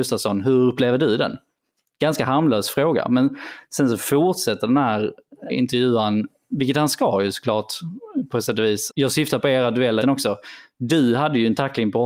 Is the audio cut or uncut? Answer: cut